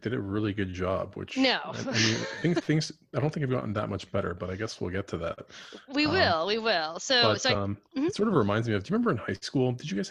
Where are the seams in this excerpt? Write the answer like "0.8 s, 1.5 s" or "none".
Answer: none